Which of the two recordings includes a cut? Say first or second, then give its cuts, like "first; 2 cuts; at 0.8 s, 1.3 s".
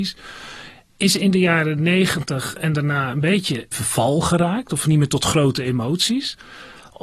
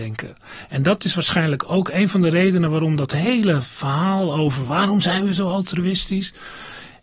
first; 2 cuts; at 3.7 s, 4.8 s